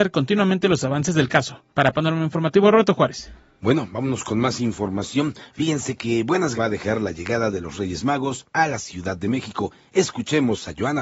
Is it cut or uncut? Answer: cut